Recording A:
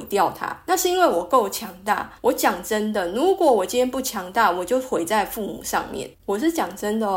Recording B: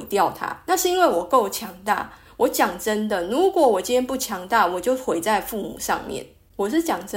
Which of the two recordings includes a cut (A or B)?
A